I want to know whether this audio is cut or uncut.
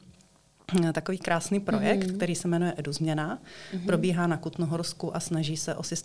uncut